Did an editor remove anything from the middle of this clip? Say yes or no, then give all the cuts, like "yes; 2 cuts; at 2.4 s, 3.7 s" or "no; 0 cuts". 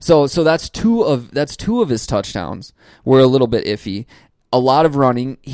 no; 0 cuts